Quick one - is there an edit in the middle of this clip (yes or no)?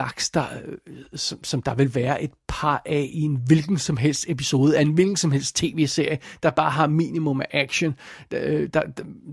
no